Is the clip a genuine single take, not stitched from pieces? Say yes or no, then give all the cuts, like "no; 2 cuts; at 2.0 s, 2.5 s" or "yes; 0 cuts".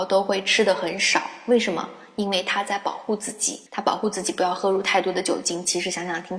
no; 1 cut; at 3.7 s